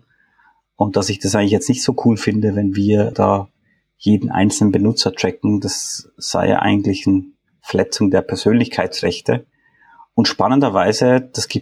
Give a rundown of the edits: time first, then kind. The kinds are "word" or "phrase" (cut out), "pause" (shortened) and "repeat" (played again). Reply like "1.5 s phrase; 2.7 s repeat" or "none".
3.1 s word